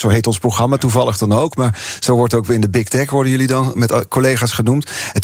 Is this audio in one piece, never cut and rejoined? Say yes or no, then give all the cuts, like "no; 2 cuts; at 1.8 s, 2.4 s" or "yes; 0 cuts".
no; 1 cut; at 3.7 s